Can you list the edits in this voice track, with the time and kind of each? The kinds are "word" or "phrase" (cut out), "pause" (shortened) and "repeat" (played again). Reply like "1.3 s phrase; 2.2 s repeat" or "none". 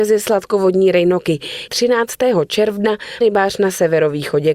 1.7 s word; 3.2 s word